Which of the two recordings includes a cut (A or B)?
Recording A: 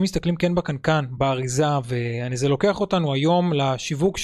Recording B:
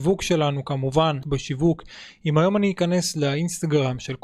B